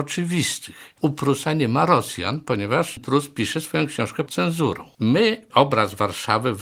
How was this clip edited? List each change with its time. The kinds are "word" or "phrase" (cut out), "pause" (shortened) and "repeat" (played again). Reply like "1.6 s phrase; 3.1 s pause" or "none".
4.3 s word; 5.5 s word